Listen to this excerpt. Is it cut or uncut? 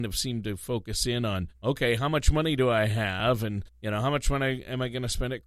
cut